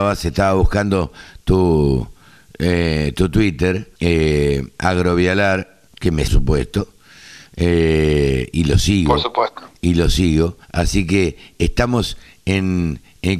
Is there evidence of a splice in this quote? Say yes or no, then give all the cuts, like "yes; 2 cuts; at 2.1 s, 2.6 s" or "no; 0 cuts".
yes; 4 cuts; at 4.0 s, 5.9 s, 6.3 s, 10.6 s